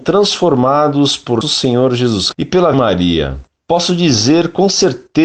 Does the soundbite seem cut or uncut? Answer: cut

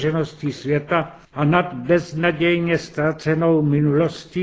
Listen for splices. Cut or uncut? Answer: cut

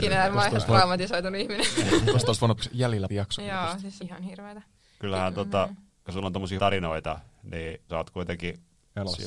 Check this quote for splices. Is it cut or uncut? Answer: cut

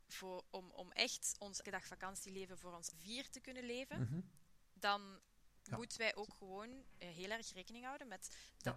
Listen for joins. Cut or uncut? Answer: cut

